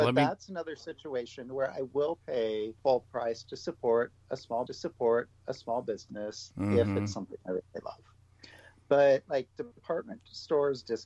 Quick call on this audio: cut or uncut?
cut